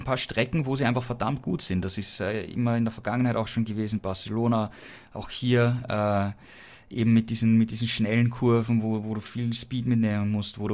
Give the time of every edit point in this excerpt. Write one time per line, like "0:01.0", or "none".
none

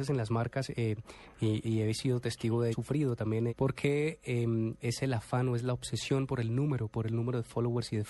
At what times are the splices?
0:01.6
0:02.7
0:03.5

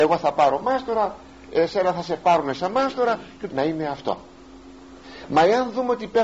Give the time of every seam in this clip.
0:03.5

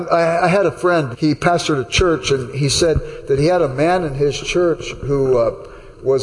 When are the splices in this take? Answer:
0:01.1

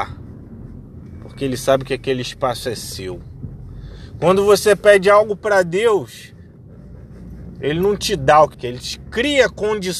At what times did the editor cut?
0:08.5

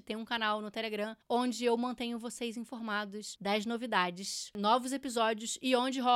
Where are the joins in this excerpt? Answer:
none

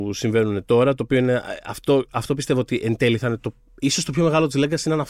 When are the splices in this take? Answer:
none

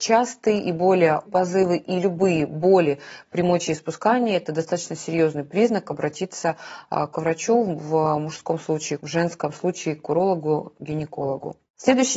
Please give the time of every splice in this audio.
0:01.3
0:09.0

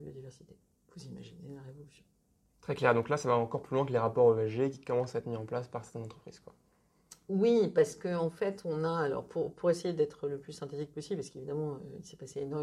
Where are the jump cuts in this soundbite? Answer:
none

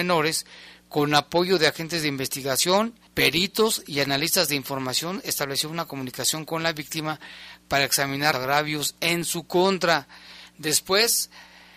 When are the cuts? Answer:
0:03.1
0:08.3

